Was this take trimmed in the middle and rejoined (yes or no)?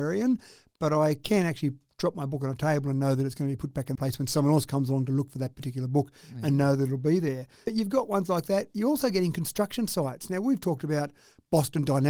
yes